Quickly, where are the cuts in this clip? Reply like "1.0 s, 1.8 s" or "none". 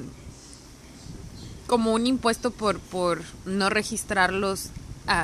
none